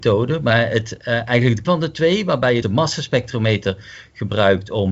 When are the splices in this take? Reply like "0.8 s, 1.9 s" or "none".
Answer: 1.6 s, 2.6 s